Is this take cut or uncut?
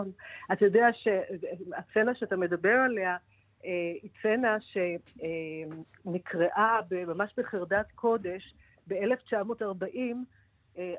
uncut